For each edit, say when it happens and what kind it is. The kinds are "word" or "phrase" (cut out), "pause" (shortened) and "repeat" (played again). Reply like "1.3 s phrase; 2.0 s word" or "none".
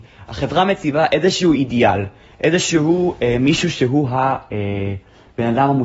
none